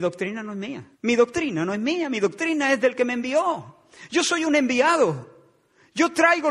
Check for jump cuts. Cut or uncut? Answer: cut